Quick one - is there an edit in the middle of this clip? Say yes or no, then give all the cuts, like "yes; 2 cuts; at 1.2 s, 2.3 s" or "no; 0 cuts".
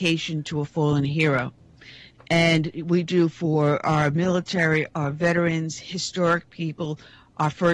no; 0 cuts